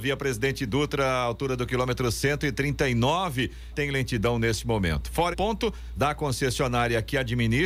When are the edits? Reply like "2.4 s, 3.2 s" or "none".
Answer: 3.7 s, 5.3 s, 6.0 s